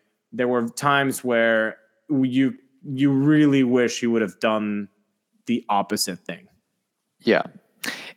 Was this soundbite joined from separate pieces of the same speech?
no; 0 cuts

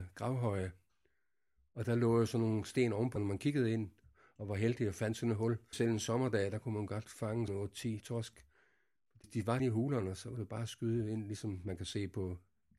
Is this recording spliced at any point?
yes; 6 cuts; at 3.2 s, 5.7 s, 7.5 s, 8.0 s, 9.2 s, 9.6 s

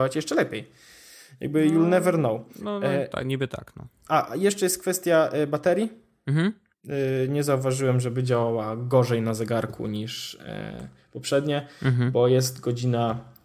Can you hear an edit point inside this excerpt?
yes; 1 cut; at 6.7 s

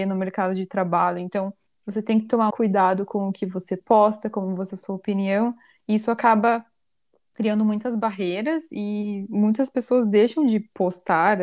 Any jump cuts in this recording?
yes; 3 cuts; at 1.7 s, 2.5 s, 4.7 s

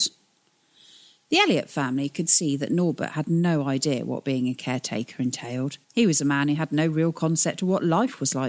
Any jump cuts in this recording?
yes; 1 cut; at 5.8 s

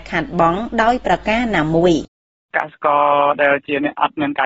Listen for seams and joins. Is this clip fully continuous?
yes; 0 cuts

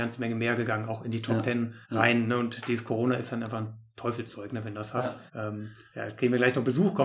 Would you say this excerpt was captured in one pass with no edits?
no; 2 cuts; at 1.8 s, 5.3 s

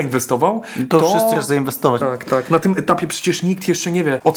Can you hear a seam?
yes; 2 cuts; at 1.3 s, 2.0 s

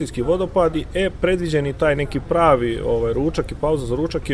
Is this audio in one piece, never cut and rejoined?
yes; 0 cuts

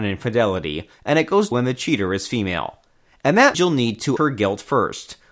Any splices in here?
yes; 3 cuts; at 1.5 s, 3.5 s, 4.2 s

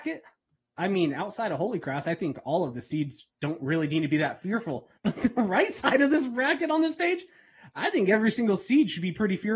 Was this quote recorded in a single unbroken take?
no; 2 cuts; at 3.3 s, 5.0 s

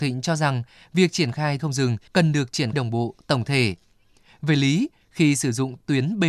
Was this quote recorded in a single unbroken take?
no; 3 cuts; at 1.6 s, 2.1 s, 2.7 s

